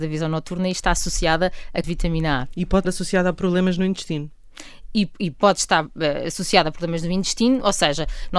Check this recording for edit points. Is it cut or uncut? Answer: cut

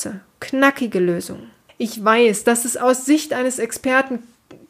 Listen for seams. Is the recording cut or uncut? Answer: cut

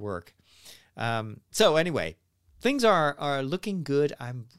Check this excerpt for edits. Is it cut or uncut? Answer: uncut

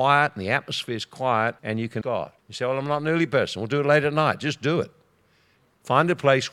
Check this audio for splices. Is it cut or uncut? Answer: cut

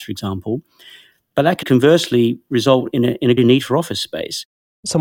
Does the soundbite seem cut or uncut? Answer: cut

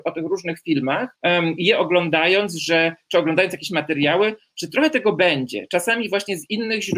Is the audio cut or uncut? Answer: cut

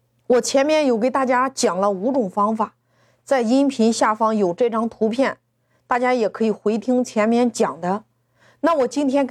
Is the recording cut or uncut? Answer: uncut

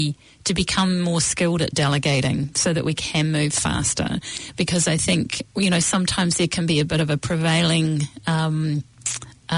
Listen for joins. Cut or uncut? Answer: cut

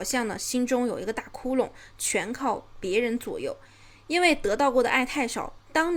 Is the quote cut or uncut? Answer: uncut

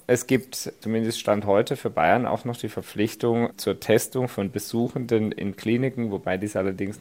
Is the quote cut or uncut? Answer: uncut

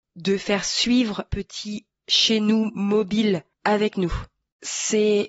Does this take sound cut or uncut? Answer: cut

